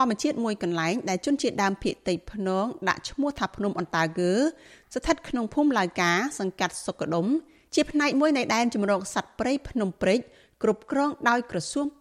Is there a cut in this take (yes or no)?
no